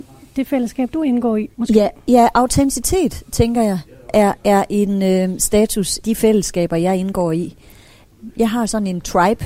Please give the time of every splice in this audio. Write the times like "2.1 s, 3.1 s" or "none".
1.5 s, 4.4 s, 6.0 s